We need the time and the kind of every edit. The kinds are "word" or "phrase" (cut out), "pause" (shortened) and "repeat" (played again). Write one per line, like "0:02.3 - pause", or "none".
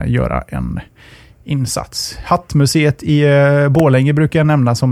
none